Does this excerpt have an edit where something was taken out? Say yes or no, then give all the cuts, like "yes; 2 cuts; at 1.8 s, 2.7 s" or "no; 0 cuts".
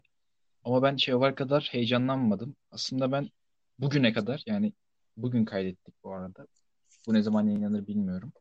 no; 0 cuts